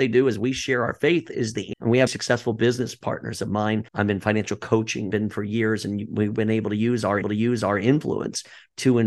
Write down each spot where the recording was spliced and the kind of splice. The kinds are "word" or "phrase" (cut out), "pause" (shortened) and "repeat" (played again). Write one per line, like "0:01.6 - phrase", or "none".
0:01.7 - word
0:02.1 - word
0:03.9 - pause
0:05.1 - word
0:07.2 - repeat